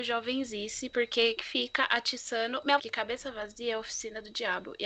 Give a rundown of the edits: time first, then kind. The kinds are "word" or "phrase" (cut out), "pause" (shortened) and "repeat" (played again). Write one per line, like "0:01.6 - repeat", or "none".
0:01.4 - word
0:02.8 - phrase

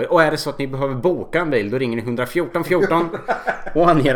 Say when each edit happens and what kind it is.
none

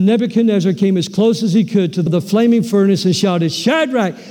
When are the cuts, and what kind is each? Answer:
0:02.1 - word

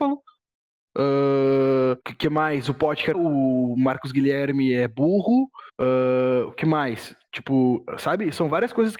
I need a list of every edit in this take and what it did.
0:02.0 - pause
0:03.1 - phrase
0:05.7 - pause

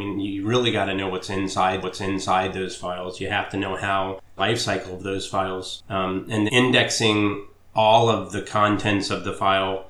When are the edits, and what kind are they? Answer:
0:01.8 - repeat
0:04.4 - phrase
0:06.5 - word

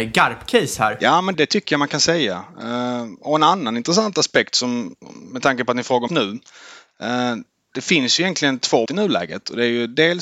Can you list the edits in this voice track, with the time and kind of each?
0:01.3 - word
0:06.1 - word
0:08.8 - word

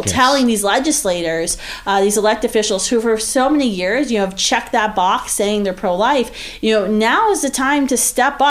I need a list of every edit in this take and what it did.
none

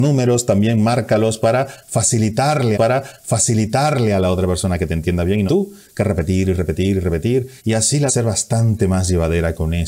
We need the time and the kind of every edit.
0:02.7 - repeat
0:05.5 - phrase
0:07.6 - pause
0:08.1 - phrase

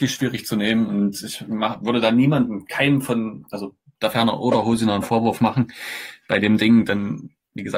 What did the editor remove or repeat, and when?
none

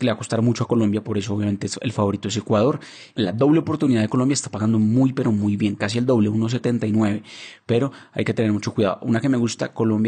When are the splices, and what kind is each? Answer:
none

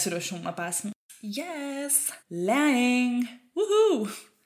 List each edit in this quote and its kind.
0:02.2 - pause

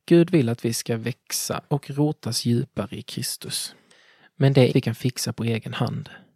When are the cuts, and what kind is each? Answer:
0:01.7 - word
0:04.7 - word

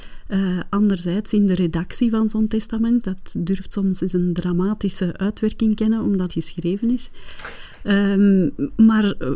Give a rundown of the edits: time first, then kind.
0:03.0 - phrase
0:06.3 - phrase

